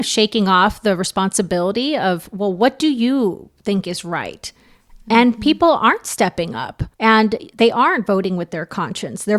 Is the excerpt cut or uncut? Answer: cut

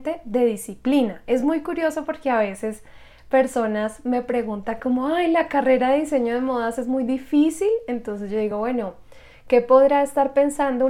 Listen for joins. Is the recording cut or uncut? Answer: uncut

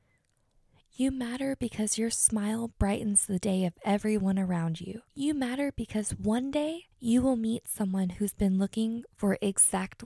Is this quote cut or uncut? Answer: cut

